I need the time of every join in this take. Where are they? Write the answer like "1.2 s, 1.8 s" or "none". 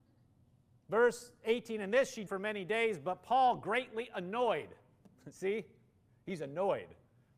2.3 s